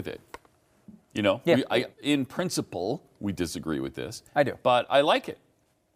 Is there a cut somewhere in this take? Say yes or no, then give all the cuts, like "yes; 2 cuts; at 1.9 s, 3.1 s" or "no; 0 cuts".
yes; 1 cut; at 1.9 s